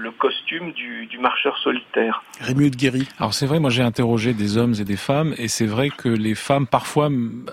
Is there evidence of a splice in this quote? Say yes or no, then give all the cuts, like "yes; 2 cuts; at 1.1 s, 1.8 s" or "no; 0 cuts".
no; 0 cuts